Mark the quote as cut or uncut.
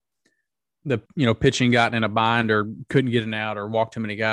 cut